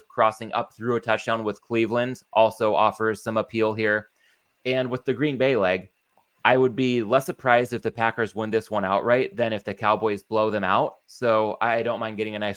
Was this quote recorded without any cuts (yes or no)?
yes